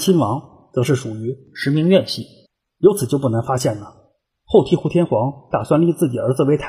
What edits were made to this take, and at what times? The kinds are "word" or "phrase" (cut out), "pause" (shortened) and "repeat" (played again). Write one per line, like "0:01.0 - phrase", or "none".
0:02.5 - pause